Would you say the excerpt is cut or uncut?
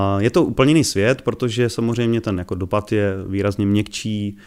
uncut